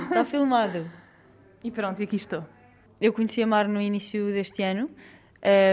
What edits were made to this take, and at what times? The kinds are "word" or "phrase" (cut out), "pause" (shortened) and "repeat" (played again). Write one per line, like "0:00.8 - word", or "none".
none